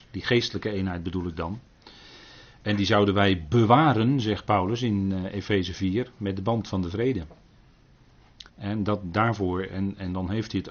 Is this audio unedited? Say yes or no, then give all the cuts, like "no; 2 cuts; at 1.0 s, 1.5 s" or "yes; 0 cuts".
no; 1 cut; at 8.5 s